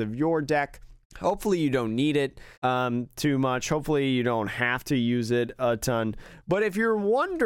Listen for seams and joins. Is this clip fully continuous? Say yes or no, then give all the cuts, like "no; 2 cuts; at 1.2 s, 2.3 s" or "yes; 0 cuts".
no; 2 cuts; at 1.0 s, 2.5 s